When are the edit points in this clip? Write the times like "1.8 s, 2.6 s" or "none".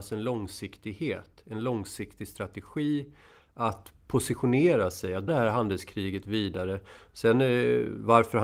5.3 s